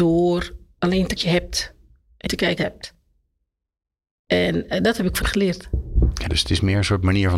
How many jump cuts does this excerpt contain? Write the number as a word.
five